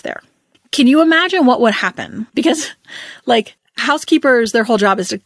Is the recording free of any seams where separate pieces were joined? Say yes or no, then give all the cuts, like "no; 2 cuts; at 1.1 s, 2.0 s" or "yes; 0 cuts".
no; 1 cut; at 2.3 s